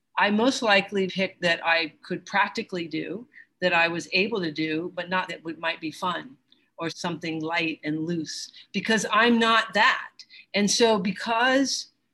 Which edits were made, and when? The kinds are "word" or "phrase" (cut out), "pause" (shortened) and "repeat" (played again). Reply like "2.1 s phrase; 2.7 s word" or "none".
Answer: 1.1 s word; 1.4 s word; 5.3 s word; 6.9 s word